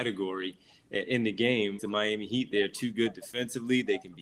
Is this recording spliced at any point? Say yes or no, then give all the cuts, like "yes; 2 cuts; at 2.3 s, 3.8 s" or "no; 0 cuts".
yes; 1 cut; at 1.8 s